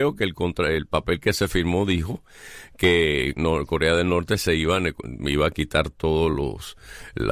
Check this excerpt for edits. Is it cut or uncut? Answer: uncut